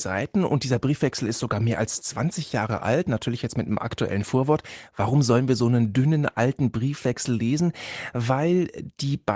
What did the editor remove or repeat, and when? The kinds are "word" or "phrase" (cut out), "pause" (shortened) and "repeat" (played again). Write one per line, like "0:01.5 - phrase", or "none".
none